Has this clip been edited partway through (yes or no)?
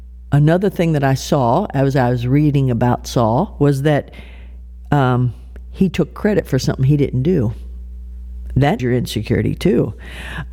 yes